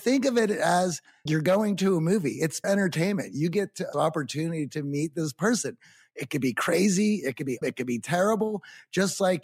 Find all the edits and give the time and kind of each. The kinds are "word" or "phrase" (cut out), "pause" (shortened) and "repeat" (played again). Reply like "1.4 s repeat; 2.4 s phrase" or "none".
1.3 s word; 2.6 s word; 3.9 s word; 7.6 s word